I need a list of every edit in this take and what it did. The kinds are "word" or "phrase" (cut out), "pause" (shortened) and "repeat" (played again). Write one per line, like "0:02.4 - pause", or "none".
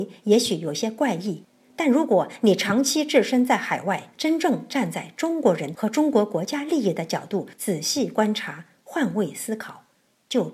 0:04.1 - pause